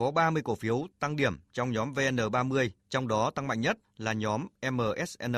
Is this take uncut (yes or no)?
no